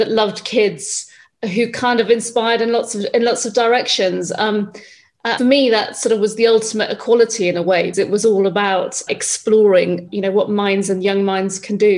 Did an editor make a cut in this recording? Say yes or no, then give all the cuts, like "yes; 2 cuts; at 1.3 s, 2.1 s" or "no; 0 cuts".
yes; 4 cuts; at 5.4 s, 7.9 s, 9.1 s, 10.1 s